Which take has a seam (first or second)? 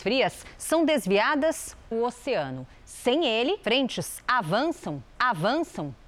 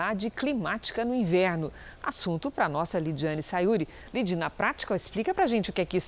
first